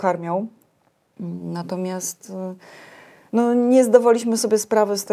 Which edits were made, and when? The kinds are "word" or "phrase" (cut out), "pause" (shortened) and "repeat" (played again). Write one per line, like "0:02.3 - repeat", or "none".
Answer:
none